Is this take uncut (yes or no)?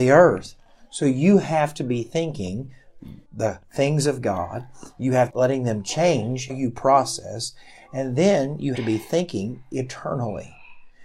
no